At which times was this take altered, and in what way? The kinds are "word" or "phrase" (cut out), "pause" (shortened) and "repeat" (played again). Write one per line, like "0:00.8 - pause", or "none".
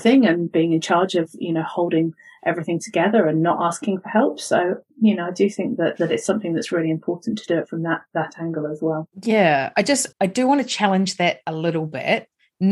0:09.1 - pause
0:10.1 - word